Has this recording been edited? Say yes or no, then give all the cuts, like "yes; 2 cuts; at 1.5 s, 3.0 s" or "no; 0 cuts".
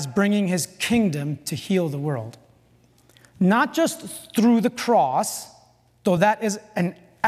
no; 0 cuts